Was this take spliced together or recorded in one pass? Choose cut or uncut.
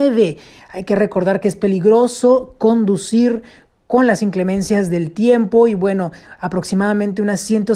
uncut